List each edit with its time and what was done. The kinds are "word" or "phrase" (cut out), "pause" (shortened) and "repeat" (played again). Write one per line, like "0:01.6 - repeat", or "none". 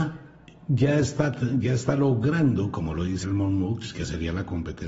0:03.2 - word

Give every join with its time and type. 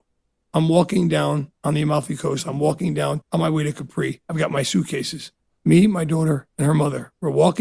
0:01.6 - pause
0:03.2 - pause
0:04.2 - pause
0:05.4 - pause
0:06.5 - pause

